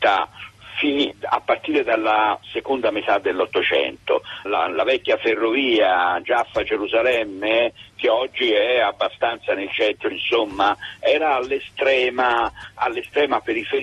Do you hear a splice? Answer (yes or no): yes